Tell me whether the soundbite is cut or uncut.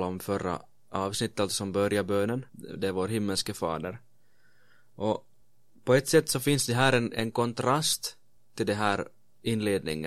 cut